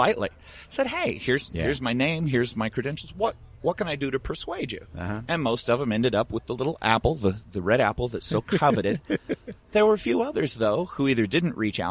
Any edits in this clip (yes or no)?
no